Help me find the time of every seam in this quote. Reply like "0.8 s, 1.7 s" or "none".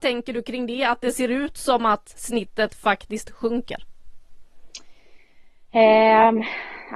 none